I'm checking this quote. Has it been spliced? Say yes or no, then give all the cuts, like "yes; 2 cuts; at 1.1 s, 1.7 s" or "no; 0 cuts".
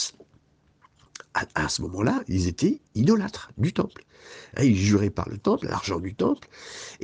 yes; 1 cut; at 2.9 s